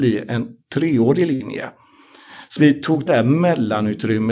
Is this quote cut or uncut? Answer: cut